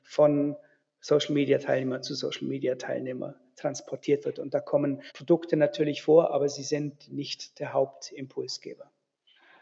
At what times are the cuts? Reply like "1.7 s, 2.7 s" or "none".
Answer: 5.1 s